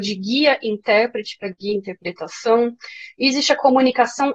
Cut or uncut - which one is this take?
uncut